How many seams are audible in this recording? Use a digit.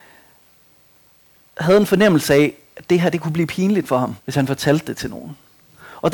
1